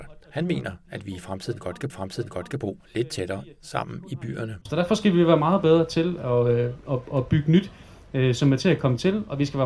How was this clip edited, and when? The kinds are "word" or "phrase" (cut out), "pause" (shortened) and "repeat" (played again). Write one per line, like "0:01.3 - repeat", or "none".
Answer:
0:01.9 - repeat
0:04.6 - pause